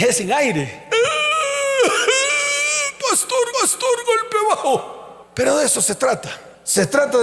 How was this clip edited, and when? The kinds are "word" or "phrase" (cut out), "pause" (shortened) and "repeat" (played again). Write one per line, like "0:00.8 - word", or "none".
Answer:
0:03.5 - repeat